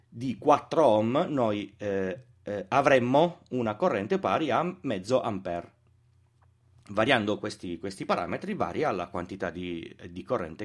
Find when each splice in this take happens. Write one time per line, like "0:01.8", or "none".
none